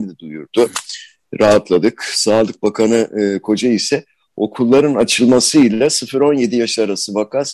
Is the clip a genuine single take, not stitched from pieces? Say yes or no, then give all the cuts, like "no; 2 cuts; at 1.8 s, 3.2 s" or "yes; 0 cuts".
yes; 0 cuts